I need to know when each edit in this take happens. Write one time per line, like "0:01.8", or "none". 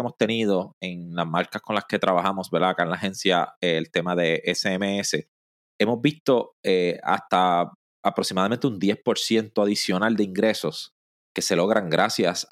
none